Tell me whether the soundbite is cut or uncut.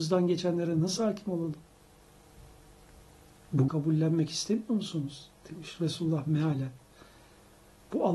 cut